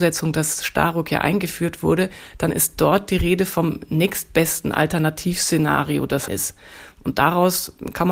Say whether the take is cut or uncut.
cut